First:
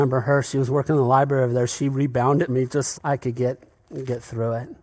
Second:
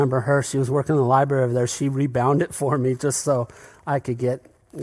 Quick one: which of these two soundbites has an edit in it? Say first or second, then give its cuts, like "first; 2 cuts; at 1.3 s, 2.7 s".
first; 2 cuts; at 2.5 s, 2.9 s